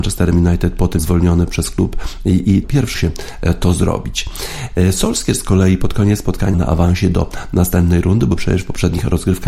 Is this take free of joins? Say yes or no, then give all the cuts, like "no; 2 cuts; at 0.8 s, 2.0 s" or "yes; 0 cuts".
no; 4 cuts; at 1.0 s, 2.6 s, 2.9 s, 6.5 s